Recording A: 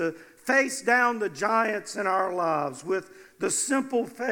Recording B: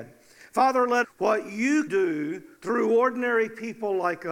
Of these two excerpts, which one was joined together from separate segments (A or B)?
B